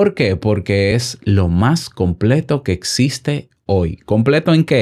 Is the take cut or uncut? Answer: uncut